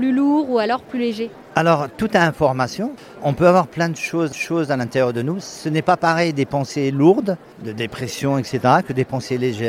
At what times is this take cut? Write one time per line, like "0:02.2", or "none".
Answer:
0:03.2
0:04.3